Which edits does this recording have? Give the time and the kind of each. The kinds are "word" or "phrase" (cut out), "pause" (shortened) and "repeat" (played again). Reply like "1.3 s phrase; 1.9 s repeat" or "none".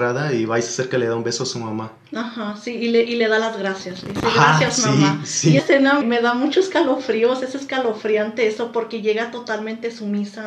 5.6 s word; 6.0 s word